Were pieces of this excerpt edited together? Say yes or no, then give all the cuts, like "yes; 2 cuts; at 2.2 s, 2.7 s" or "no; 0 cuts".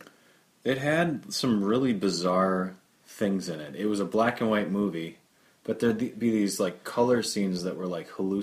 no; 0 cuts